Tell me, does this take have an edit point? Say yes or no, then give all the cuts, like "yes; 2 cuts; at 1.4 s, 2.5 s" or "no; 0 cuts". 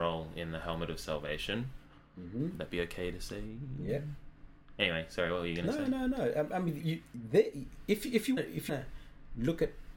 yes; 3 cuts; at 6.8 s, 8.4 s, 8.7 s